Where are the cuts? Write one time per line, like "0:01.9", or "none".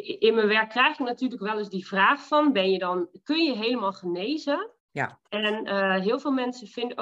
0:04.8